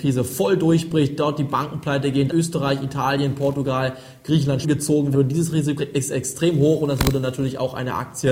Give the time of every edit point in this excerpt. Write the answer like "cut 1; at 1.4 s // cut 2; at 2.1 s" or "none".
cut 1; at 2.3 s // cut 2; at 4.6 s // cut 3; at 5.1 s // cut 4; at 5.8 s